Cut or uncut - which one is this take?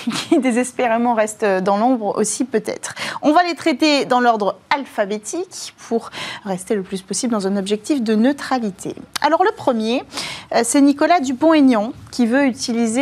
uncut